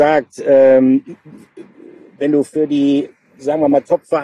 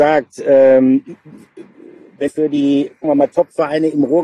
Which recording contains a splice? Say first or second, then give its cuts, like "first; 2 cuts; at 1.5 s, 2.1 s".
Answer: second; 2 cuts; at 2.3 s, 3.0 s